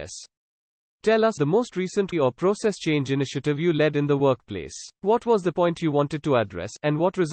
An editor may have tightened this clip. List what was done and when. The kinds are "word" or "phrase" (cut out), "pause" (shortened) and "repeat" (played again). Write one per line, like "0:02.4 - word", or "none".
0:01.4 - word
0:02.1 - word
0:04.9 - pause
0:05.5 - word